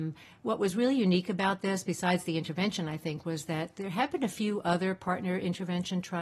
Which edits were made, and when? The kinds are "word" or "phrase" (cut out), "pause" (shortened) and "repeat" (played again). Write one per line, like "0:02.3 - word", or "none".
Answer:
none